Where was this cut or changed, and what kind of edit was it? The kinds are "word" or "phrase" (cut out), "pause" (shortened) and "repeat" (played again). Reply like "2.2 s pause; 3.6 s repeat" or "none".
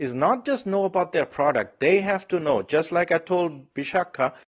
none